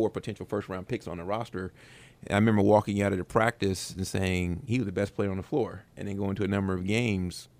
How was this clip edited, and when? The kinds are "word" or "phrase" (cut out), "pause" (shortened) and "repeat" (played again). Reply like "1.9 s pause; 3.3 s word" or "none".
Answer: 5.9 s pause